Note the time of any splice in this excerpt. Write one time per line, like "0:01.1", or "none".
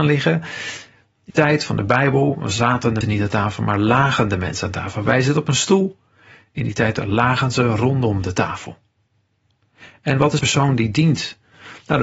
0:01.3
0:03.0
0:10.4